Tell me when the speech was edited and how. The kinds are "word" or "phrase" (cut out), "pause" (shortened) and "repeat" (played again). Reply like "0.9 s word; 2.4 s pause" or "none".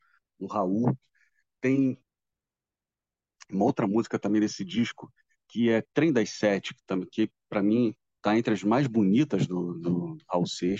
none